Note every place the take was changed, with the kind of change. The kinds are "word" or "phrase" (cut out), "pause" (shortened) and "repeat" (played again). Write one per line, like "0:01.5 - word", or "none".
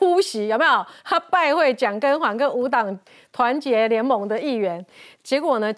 none